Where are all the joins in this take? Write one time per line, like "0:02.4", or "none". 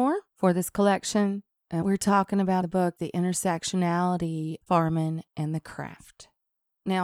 0:01.8
0:02.6
0:03.0
0:04.6

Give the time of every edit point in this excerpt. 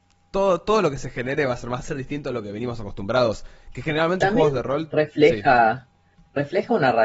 0:01.8
0:04.2

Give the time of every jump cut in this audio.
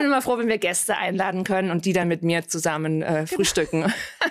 none

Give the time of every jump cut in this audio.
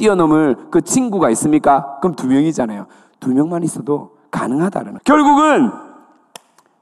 0:05.0

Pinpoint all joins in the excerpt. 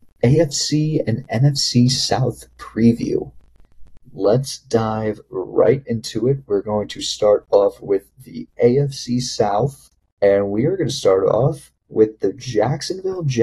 0:04.0
0:10.1

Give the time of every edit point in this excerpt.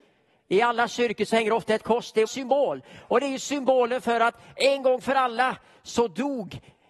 0:02.3

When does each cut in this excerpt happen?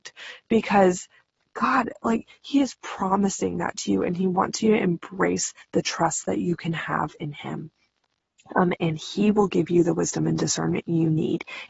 none

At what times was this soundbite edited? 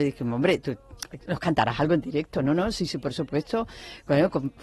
none

